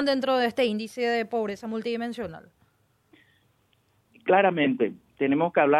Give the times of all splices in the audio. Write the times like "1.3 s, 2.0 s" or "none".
none